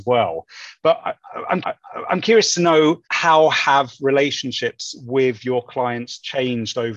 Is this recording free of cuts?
no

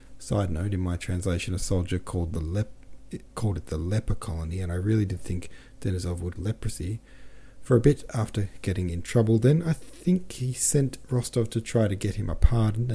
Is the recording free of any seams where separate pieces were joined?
no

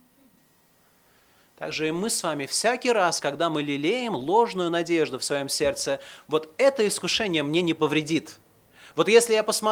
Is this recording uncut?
yes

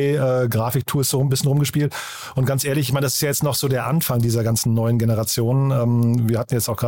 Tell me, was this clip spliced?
no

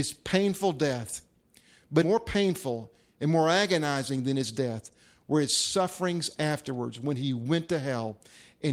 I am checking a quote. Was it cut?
yes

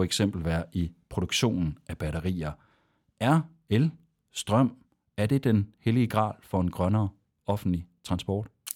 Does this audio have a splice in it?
no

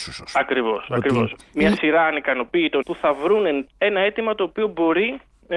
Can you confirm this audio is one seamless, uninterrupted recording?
no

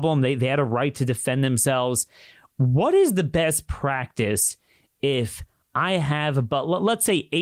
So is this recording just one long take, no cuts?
yes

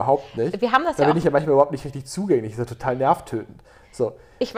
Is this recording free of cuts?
yes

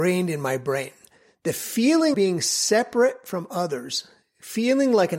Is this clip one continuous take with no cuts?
no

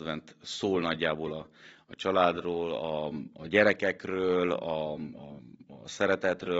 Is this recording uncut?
yes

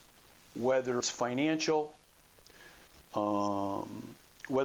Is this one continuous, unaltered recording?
no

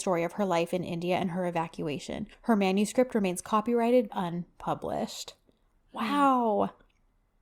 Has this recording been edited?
yes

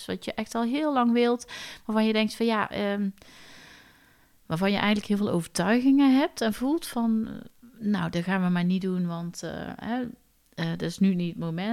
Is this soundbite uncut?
yes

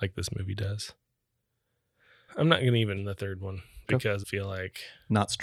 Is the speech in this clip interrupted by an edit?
yes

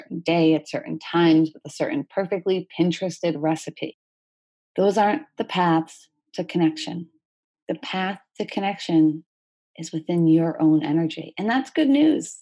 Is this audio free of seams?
yes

